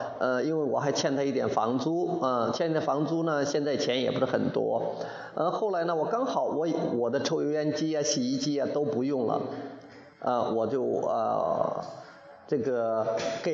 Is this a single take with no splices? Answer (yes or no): yes